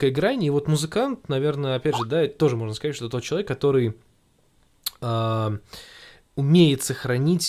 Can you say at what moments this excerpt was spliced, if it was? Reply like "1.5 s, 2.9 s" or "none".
none